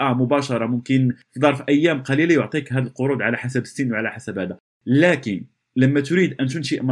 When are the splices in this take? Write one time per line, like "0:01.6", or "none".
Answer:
none